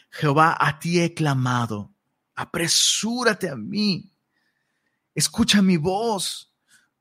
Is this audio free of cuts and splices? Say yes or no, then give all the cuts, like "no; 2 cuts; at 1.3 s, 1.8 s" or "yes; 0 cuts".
yes; 0 cuts